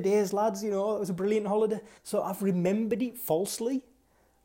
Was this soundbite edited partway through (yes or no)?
yes